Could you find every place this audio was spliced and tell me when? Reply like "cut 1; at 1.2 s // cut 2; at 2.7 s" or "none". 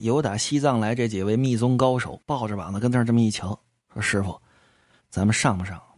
cut 1; at 2.2 s